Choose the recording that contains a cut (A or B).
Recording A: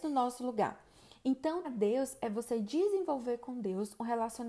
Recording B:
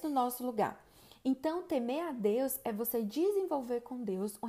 A